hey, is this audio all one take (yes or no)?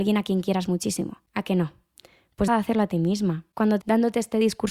no